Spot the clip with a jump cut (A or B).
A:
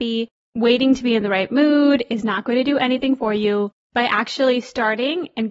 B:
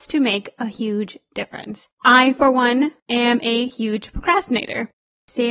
B